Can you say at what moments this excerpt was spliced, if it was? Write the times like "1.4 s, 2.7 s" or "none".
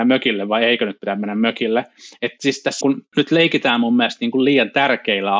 2.8 s